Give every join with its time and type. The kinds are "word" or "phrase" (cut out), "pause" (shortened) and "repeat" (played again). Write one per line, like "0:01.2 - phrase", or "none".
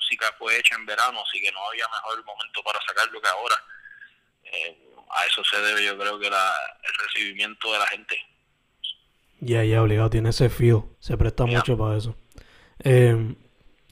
0:10.9 - pause